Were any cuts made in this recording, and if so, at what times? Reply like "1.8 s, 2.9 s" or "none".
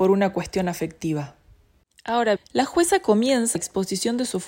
2.4 s, 3.6 s